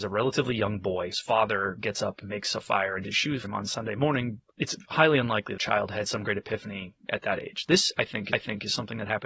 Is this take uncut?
no; 6 cuts; at 1.1 s, 3.0 s, 3.4 s, 4.5 s, 5.6 s, 8.3 s

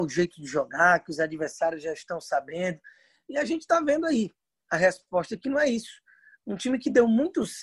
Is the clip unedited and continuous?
yes; 0 cuts

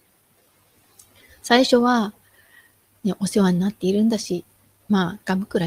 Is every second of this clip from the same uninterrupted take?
yes; 0 cuts

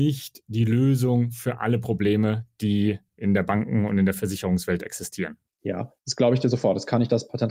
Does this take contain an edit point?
no; 0 cuts

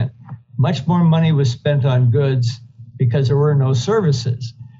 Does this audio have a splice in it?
no; 0 cuts

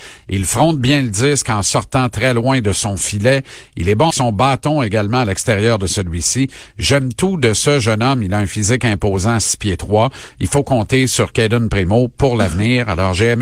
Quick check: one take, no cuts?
no; 1 cut; at 4.1 s

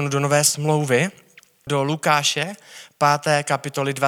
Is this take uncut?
yes; 0 cuts

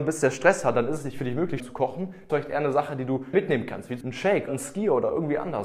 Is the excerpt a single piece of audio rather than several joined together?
no; 5 cuts; at 1.6 s, 2.3 s, 3.3 s, 4.0 s, 4.5 s

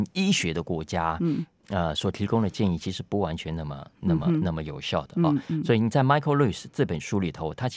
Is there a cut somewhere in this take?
no; 0 cuts

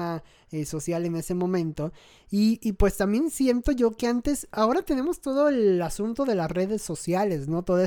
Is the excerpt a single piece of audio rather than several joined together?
yes; 0 cuts

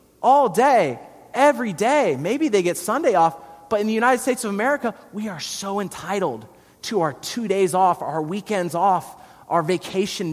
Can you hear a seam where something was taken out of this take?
no; 0 cuts

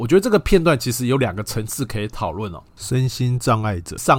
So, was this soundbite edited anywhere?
yes; 1 cut; at 2.7 s

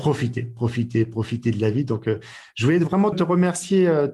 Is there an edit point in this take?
yes; 1 cut; at 3.1 s

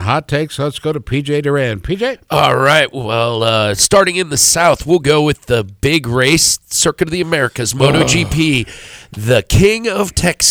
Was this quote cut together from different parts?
no; 0 cuts

